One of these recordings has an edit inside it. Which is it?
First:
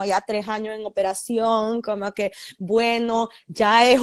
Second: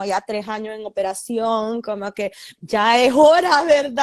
second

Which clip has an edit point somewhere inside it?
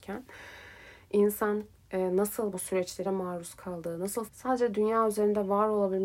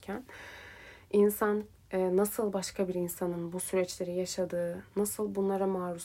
first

